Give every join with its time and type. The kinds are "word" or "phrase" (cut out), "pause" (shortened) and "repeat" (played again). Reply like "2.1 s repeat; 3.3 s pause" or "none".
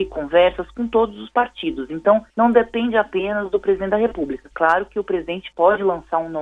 2.3 s pause

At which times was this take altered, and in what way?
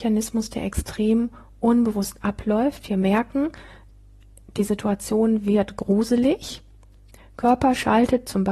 none

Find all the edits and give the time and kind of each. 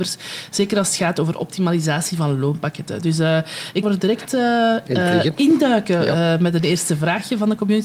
3.8 s phrase

